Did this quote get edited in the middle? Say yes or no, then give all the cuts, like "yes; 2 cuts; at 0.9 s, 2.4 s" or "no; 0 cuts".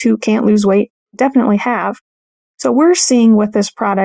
no; 0 cuts